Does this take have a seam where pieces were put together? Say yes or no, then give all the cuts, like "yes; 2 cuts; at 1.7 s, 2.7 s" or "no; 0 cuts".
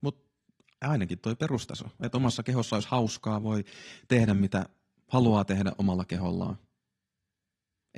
no; 0 cuts